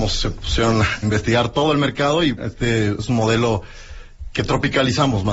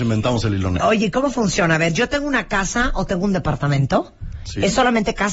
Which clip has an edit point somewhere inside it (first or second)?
first